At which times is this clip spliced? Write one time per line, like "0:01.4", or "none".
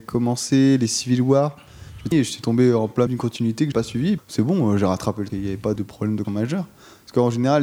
0:02.1
0:03.1
0:03.7
0:04.2
0:05.3
0:05.8
0:06.2